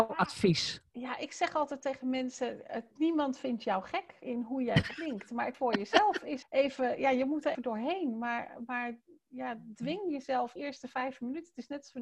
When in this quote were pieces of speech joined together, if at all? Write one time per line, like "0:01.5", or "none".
0:02.9
0:04.2
0:05.5
0:06.4
0:07.5
0:10.6